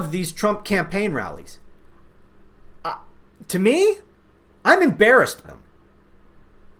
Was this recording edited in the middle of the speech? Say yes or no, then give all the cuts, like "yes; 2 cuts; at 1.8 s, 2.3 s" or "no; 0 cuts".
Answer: yes; 1 cut; at 5.4 s